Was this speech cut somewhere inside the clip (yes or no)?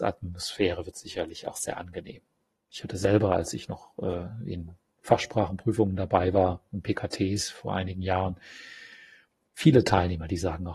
no